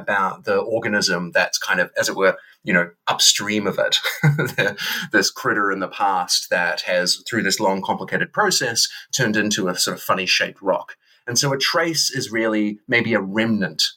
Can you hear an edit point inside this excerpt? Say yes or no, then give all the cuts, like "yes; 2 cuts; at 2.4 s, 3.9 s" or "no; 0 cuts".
no; 0 cuts